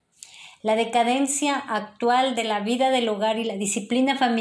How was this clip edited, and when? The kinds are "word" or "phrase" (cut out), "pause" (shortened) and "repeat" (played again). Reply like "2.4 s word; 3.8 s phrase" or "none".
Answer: none